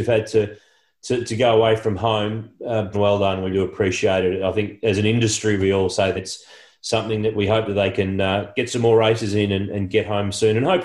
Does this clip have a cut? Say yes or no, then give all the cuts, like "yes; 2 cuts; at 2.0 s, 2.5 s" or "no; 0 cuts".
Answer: yes; 3 cuts; at 2.9 s, 3.5 s, 6.1 s